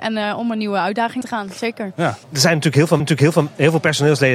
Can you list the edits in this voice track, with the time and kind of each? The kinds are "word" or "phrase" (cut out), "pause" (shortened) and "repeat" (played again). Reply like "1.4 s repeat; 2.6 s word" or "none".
1.2 s word; 2.2 s pause; 3.0 s repeat